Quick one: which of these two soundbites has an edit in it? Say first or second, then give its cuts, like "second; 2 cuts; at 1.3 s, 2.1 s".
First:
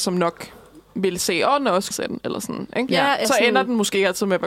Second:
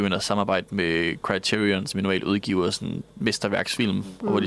first; 2 cuts; at 1.9 s, 3.2 s